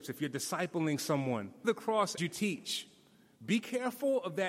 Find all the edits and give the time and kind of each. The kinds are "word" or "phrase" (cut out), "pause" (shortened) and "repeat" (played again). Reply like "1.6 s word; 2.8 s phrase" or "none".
1.6 s word; 2.2 s word